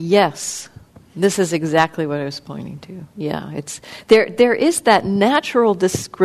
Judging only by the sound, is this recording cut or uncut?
uncut